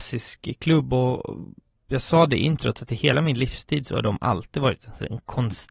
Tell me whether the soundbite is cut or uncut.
uncut